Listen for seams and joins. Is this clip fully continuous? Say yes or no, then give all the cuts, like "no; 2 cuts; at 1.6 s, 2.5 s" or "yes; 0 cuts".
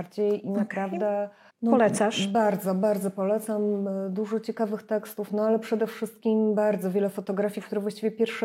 no; 1 cut; at 1.5 s